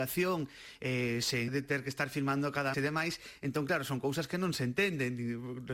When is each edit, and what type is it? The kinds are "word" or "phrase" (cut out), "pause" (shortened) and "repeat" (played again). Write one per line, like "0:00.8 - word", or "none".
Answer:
0:01.5 - word
0:02.7 - word